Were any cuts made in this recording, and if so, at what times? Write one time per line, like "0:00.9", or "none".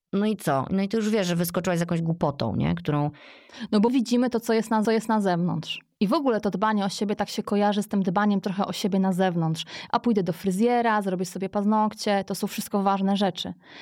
0:03.9
0:04.8